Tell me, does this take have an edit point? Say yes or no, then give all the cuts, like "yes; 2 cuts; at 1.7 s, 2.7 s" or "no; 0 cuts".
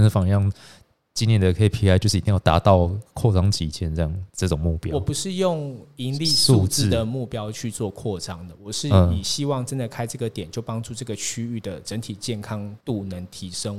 yes; 1 cut; at 12.8 s